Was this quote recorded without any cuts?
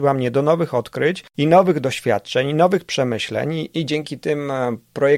no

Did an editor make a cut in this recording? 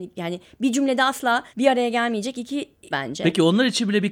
yes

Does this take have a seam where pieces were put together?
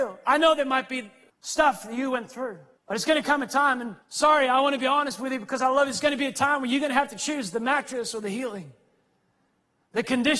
yes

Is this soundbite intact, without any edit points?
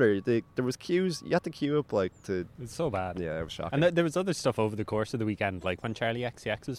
yes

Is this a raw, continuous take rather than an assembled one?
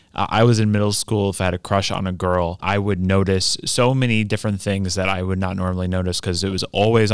yes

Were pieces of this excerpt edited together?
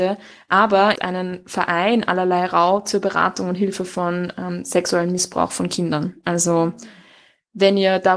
yes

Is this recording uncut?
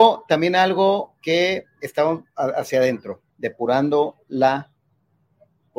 no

